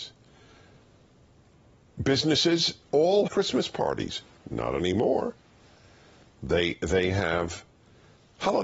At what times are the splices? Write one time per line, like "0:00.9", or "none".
0:03.3